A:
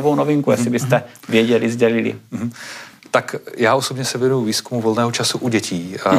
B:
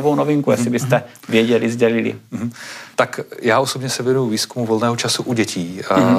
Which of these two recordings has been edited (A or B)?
B